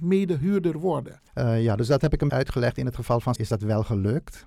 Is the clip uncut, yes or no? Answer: no